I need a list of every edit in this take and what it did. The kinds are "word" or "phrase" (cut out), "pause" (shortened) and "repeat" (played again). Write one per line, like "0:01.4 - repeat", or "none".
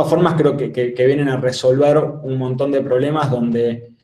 none